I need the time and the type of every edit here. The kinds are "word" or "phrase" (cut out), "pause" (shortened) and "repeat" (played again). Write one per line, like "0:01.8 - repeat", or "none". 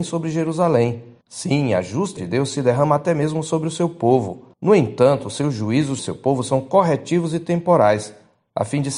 0:01.2 - pause
0:02.2 - word
0:04.5 - pause
0:06.0 - word